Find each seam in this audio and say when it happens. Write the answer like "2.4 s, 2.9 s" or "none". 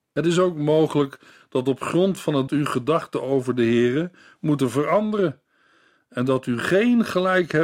2.5 s